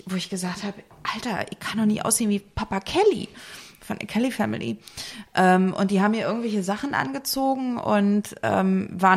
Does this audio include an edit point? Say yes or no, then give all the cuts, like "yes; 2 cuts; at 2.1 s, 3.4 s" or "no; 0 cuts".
no; 0 cuts